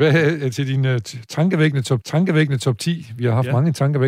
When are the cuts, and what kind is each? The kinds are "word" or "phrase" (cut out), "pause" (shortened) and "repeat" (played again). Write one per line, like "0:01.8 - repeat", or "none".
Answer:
0:02.0 - repeat